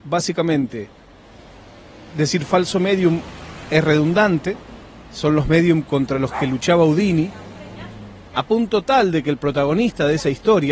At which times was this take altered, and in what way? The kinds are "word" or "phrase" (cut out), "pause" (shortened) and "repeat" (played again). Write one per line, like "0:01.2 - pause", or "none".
0:08.3 - pause